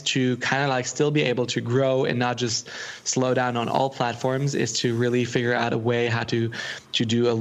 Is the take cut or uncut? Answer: uncut